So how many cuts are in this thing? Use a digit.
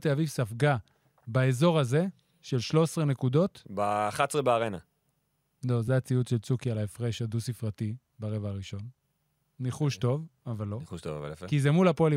0